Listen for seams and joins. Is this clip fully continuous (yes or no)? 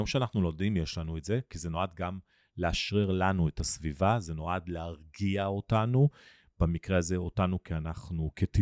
yes